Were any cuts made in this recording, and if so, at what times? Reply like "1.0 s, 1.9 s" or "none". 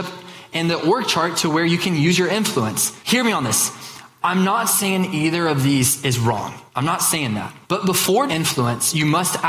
3.0 s, 6.7 s, 7.6 s, 8.3 s